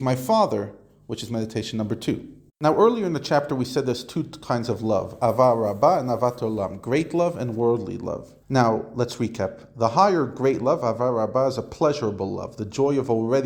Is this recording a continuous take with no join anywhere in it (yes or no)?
no